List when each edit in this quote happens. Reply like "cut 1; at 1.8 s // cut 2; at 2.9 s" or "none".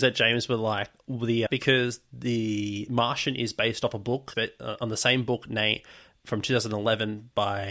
cut 1; at 1.5 s // cut 2; at 4.3 s